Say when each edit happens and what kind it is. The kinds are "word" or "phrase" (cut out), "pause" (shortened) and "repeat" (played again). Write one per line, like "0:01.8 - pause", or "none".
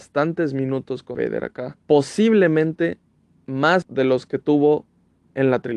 0:01.1 - word
0:01.8 - pause
0:03.8 - word